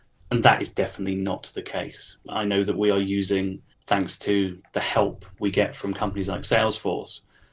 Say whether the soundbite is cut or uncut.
cut